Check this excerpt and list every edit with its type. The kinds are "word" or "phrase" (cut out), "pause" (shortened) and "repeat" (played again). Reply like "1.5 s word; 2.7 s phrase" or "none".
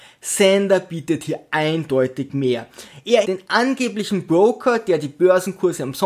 3.2 s word